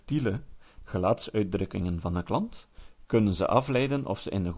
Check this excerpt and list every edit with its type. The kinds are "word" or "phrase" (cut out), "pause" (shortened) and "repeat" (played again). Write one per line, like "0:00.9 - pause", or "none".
none